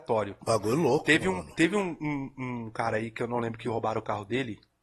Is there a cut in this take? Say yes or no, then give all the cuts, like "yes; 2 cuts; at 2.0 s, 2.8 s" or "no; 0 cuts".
no; 0 cuts